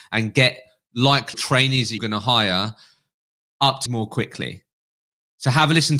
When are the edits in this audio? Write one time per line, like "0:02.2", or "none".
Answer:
0:01.3
0:02.0
0:03.9